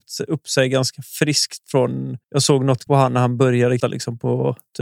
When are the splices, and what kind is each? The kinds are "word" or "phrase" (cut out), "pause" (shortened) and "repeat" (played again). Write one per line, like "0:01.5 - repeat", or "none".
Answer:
0:02.2 - pause
0:02.9 - word
0:03.8 - word

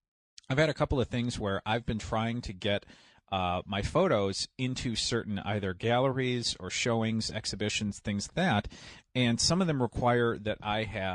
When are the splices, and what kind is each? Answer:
0:08.3 - word

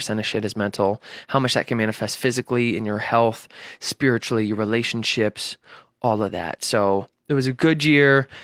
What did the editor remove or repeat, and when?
none

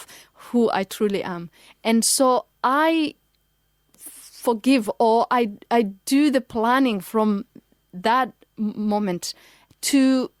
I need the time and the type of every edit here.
none

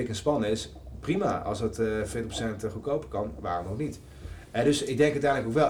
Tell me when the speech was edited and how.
none

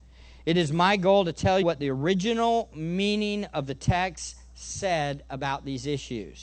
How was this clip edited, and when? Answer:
0:01.6 - word

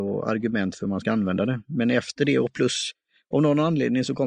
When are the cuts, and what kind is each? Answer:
none

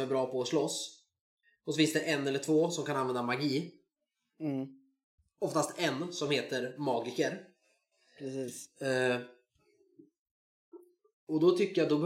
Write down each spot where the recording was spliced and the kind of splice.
none

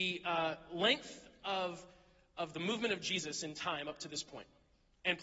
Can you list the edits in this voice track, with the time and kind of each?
none

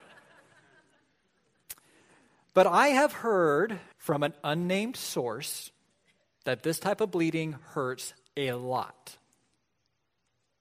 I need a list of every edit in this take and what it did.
0:03.9 - pause
0:06.2 - pause

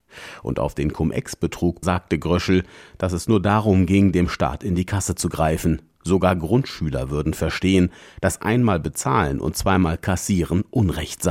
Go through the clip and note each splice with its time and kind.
0:01.8 - word

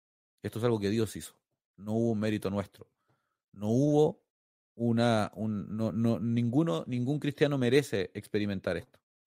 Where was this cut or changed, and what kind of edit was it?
none

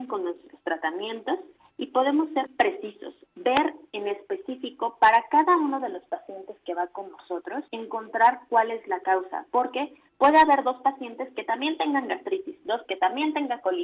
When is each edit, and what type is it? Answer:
0:02.5 - word
0:07.7 - pause
0:12.8 - word

